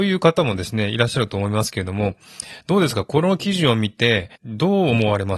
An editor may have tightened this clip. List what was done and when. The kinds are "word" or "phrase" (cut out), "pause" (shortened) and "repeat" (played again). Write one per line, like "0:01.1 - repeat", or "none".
0:04.4 - pause